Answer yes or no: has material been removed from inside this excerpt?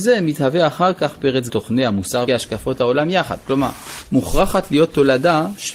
yes